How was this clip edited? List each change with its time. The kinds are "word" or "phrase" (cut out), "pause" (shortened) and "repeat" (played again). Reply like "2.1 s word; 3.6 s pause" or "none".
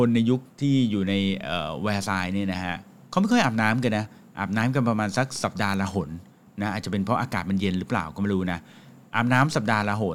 none